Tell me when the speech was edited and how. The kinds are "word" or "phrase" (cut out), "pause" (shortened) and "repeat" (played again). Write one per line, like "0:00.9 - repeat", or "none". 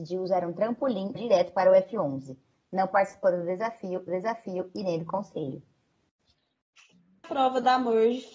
0:01.2 - phrase
0:04.1 - repeat
0:07.2 - word

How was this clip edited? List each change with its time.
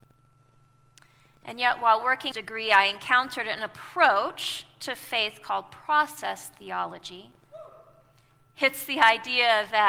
0:02.3 - phrase

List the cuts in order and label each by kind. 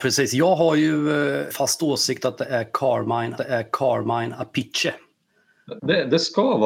0:01.5 - word
0:03.4 - repeat

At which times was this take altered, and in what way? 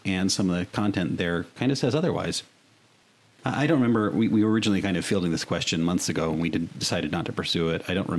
none

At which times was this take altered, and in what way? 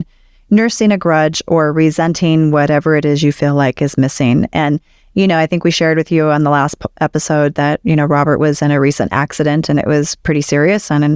none

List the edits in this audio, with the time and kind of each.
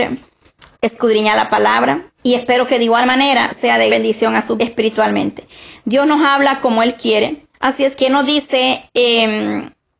0:02.2 - pause
0:03.9 - word
0:04.6 - word
0:07.5 - pause
0:07.9 - word

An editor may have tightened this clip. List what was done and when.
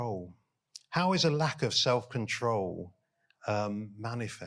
none

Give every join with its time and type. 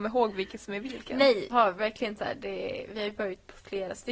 0:01.5 - word

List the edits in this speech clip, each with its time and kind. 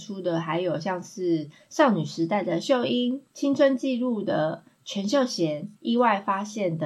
0:03.3 - pause
0:05.8 - pause

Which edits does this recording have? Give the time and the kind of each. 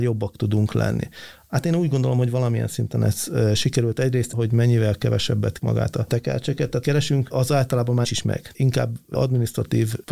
0:05.6 - word
0:06.8 - word
0:08.0 - word

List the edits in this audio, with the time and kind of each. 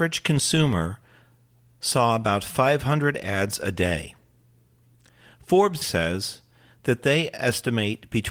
0:05.8 - word

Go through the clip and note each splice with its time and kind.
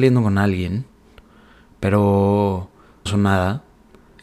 0:03.1 - word

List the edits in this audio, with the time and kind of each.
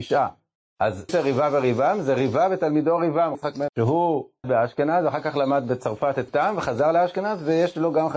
0:01.1 - word
0:03.3 - word
0:03.7 - word
0:04.4 - word
0:06.3 - word

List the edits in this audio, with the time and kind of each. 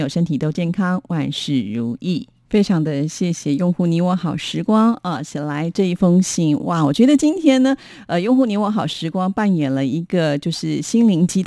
none

